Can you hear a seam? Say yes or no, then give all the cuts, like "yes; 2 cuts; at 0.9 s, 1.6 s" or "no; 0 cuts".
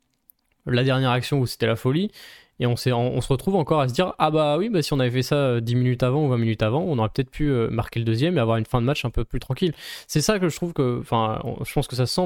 no; 0 cuts